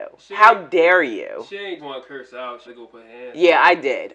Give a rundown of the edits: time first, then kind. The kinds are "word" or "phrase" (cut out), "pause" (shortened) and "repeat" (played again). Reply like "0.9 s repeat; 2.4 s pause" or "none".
1.8 s word; 2.7 s word